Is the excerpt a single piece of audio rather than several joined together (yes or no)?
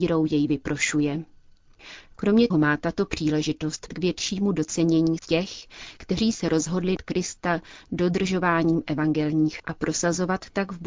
no